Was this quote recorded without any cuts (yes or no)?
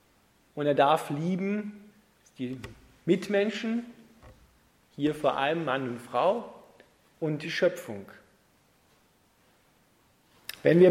yes